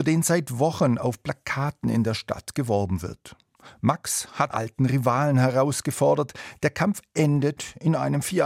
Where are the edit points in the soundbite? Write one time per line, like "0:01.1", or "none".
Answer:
0:04.5

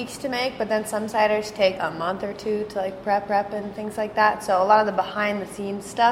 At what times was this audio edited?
0:01.7
0:03.3

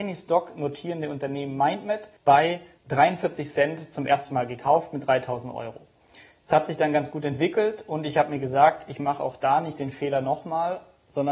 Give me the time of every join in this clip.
0:02.2

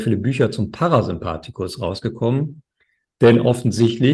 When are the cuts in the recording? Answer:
none

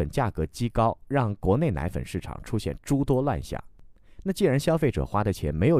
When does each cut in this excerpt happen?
none

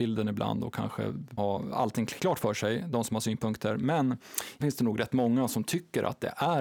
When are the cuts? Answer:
0:01.4
0:02.2
0:04.6

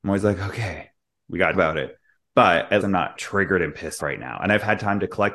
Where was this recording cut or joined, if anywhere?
0:01.5
0:02.8
0:03.2
0:04.0

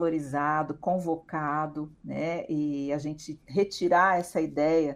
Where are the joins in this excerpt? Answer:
0:01.9

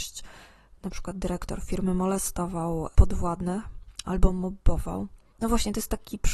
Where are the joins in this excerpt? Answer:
none

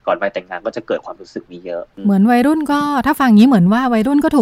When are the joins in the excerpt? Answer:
0:01.9

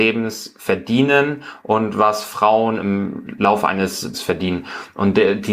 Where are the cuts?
0:04.1

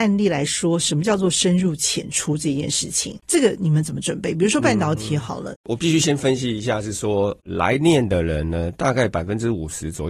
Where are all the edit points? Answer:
0:03.2
0:05.5

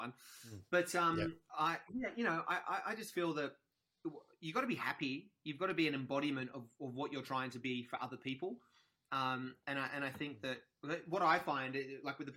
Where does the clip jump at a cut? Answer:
none

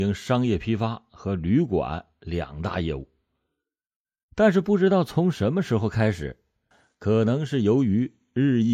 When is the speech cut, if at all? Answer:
none

